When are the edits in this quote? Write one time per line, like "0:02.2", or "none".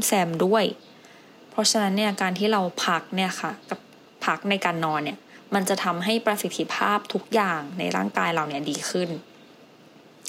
0:03.6